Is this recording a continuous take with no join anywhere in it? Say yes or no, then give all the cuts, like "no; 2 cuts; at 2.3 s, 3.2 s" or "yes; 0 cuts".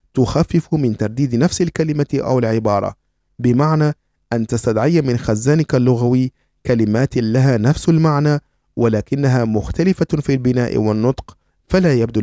yes; 0 cuts